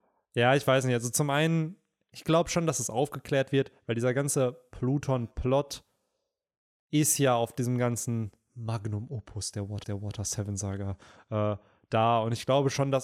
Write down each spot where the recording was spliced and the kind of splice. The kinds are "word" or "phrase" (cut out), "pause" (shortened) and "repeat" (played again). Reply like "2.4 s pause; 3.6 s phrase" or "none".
9.8 s repeat